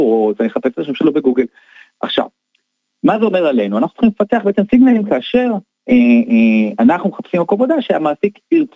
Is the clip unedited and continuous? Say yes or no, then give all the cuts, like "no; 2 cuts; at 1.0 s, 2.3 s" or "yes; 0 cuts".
yes; 0 cuts